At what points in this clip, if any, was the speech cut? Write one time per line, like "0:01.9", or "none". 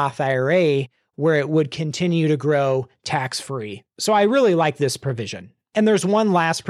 none